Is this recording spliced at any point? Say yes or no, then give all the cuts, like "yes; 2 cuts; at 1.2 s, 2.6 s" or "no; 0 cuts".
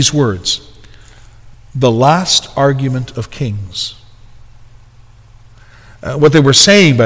no; 0 cuts